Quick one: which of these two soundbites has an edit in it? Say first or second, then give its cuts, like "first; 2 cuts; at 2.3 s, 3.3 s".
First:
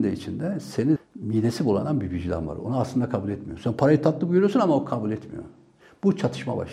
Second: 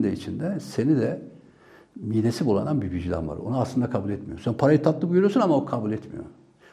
first; 1 cut; at 1.0 s